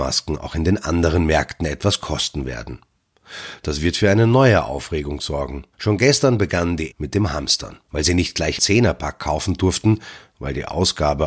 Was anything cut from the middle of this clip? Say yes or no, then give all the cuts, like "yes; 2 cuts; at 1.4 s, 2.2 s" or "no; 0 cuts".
yes; 4 cuts; at 5.7 s, 6.9 s, 7.8 s, 8.6 s